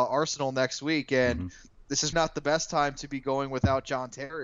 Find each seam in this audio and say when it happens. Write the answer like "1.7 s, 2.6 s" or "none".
2.1 s

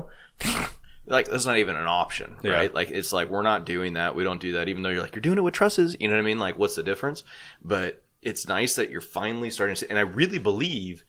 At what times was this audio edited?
none

